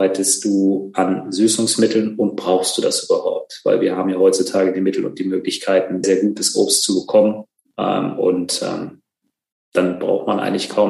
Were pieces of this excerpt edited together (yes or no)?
yes